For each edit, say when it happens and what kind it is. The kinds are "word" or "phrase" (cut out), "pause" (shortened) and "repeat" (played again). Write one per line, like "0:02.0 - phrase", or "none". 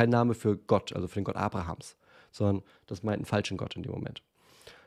none

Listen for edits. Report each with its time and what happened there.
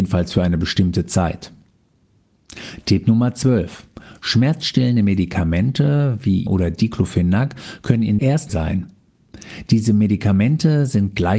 0:06.5 - word
0:08.2 - word
0:08.5 - phrase

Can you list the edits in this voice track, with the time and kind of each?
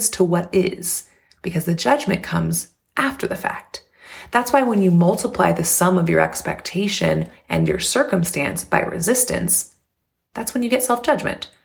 none

